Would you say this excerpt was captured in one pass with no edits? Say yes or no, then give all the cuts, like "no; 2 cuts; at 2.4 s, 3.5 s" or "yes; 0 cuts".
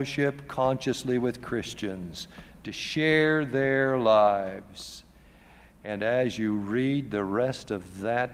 yes; 0 cuts